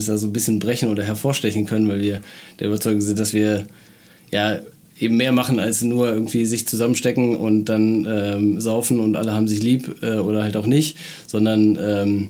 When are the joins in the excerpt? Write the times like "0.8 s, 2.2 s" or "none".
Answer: none